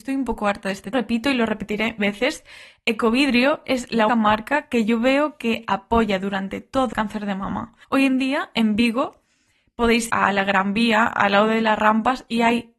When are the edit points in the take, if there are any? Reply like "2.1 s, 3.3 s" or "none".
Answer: 0.9 s, 2.0 s, 4.1 s, 6.9 s, 7.8 s, 10.1 s